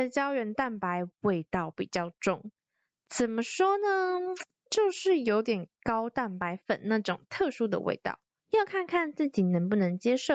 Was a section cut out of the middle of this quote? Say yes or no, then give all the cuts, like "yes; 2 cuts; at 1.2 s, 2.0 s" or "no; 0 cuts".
yes; 1 cut; at 8.4 s